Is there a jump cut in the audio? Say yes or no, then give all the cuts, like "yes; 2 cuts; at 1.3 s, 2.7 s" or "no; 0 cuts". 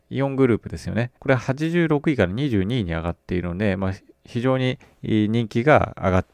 yes; 2 cuts; at 1.2 s, 4.8 s